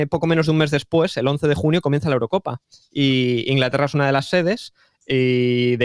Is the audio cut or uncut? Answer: uncut